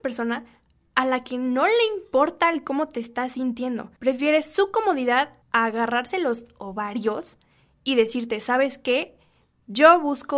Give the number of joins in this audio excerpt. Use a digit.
2